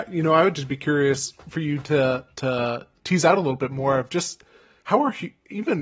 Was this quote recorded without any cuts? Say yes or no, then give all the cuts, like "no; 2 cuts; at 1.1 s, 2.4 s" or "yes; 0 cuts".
no; 1 cut; at 2.3 s